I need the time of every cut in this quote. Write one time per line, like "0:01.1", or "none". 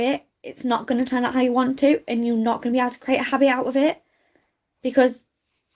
none